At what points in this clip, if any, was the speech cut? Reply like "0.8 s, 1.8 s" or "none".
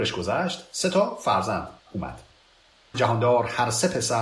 1.8 s, 2.9 s